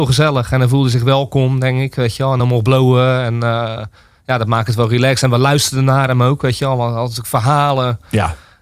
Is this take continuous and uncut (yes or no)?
yes